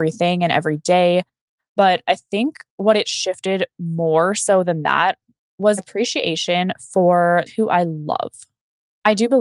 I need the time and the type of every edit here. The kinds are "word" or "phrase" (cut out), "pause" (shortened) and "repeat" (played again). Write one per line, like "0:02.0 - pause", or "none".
0:05.8 - word
0:07.5 - word